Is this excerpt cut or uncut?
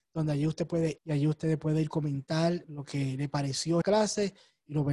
cut